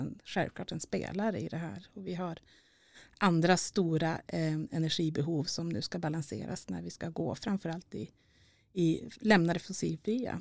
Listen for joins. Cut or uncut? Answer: uncut